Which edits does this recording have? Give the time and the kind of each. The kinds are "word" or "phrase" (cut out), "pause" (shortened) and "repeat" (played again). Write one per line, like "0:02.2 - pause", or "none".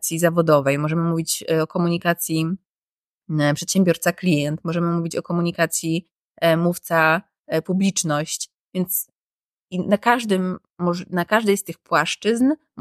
none